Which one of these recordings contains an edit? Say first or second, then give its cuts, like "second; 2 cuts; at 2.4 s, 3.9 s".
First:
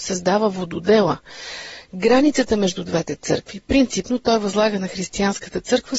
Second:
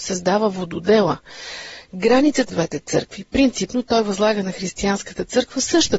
second; 1 cut; at 2.5 s